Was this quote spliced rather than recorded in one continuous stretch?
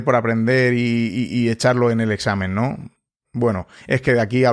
no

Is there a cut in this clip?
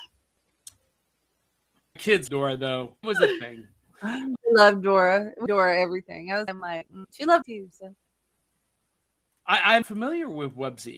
yes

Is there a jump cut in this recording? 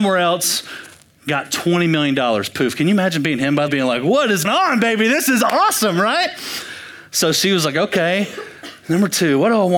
yes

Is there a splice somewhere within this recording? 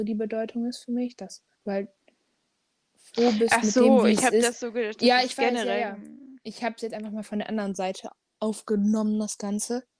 yes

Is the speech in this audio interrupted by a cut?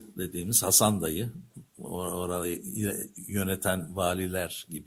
no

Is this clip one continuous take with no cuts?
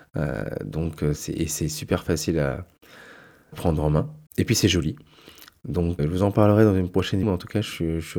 no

